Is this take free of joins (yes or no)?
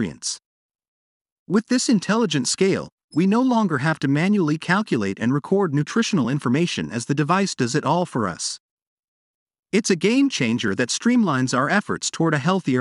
yes